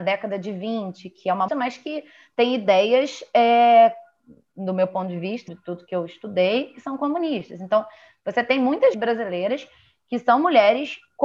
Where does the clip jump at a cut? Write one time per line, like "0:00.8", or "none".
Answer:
0:01.5
0:05.5
0:08.9